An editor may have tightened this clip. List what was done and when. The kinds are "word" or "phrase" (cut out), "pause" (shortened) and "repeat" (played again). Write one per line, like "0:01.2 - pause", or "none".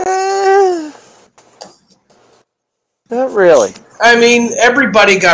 none